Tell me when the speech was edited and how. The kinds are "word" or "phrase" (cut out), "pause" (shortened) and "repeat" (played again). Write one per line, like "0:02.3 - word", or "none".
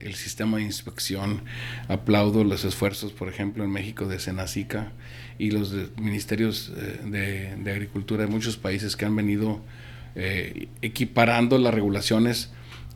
none